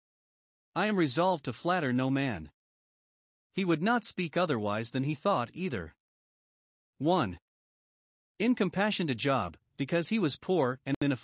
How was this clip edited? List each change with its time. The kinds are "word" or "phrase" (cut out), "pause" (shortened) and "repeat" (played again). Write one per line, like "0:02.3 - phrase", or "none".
none